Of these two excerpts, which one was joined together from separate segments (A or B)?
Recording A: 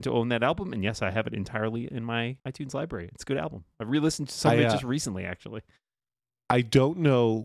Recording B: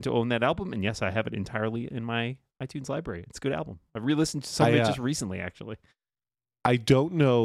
A